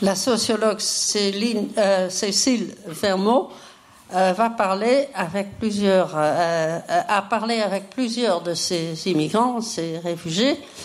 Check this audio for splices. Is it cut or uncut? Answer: uncut